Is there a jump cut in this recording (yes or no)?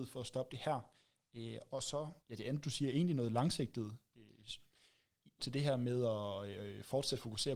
yes